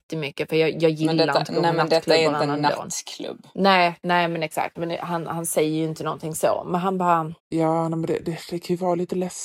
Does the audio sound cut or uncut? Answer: cut